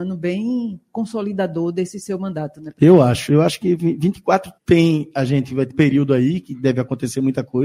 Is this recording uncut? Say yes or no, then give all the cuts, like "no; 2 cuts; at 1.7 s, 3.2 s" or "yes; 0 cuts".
no; 2 cuts; at 4.6 s, 5.7 s